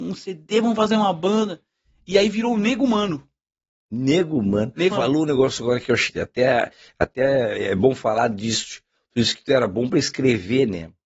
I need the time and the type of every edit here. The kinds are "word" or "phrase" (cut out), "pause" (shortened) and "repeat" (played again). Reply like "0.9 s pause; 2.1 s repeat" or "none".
4.9 s word; 6.1 s word